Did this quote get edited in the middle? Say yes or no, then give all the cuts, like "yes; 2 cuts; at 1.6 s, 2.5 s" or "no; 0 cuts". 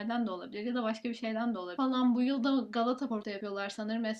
no; 0 cuts